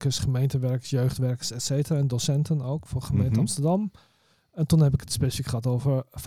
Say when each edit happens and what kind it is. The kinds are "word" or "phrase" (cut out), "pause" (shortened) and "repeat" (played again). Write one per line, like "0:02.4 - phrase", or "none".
none